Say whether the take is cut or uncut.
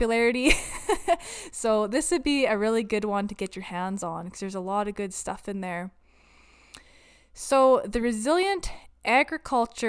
uncut